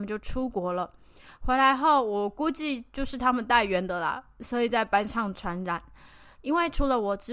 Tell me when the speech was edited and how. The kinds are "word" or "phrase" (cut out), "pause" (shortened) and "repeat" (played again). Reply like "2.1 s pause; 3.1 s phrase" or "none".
none